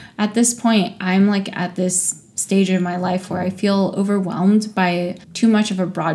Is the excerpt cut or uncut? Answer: cut